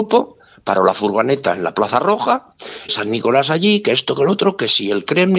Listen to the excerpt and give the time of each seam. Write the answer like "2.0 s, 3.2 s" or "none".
2.9 s